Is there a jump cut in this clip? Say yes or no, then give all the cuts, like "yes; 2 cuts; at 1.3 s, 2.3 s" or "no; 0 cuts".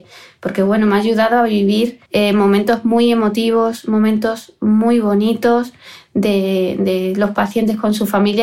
yes; 1 cut; at 2.1 s